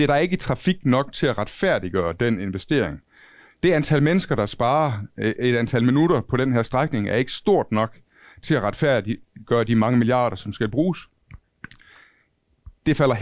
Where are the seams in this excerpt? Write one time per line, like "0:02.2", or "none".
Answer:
none